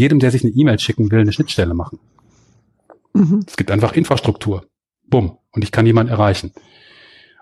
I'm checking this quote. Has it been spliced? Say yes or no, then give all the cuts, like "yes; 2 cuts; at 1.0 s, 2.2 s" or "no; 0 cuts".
no; 0 cuts